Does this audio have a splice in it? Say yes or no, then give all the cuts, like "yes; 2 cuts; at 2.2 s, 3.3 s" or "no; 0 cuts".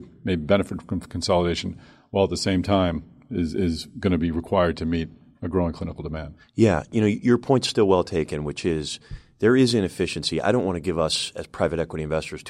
no; 0 cuts